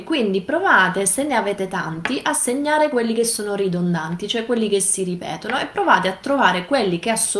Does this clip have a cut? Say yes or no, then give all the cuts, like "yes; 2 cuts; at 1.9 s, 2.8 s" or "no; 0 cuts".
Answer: no; 0 cuts